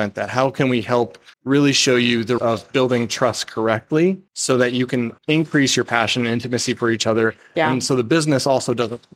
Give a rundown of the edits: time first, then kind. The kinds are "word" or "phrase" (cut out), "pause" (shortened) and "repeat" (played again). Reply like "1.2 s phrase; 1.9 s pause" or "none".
1.3 s pause; 2.4 s word; 4.3 s pause; 5.2 s pause

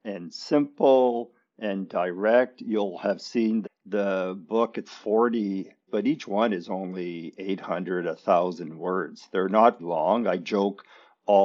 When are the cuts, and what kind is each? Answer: 3.6 s word; 4.8 s word; 5.9 s word; 9.8 s word

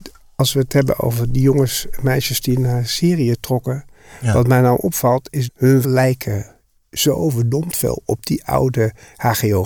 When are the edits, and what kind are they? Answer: 5.5 s word; 5.8 s word

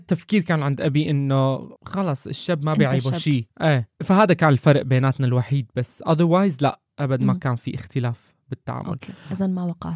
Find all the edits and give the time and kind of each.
1.8 s pause

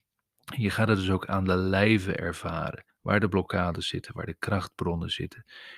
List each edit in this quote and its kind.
2.9 s pause

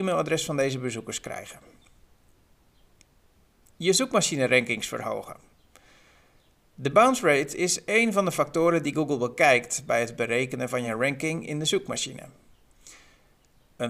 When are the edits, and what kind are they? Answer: none

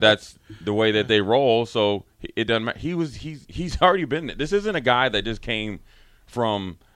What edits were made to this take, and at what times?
3.4 s word

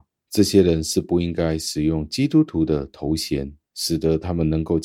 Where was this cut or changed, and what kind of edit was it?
3.6 s pause

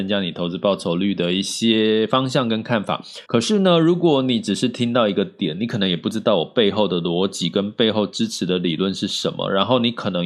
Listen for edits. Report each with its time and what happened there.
3.2 s pause

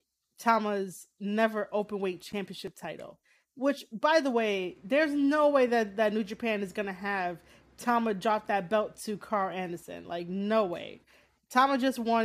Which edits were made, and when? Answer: none

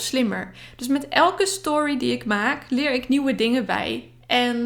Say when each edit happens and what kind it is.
none

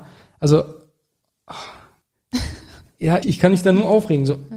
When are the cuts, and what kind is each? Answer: 3.2 s word

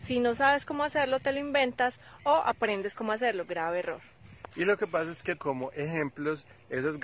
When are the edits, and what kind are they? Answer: 5.4 s word

